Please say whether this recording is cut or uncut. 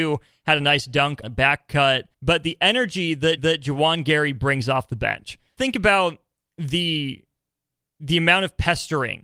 cut